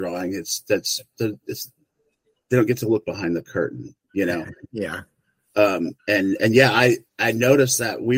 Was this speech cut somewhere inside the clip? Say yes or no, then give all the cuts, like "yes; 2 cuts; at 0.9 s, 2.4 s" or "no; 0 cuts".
yes; 2 cuts; at 6.0 s, 7.1 s